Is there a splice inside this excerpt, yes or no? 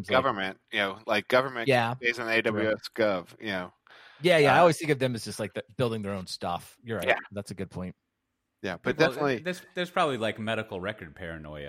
no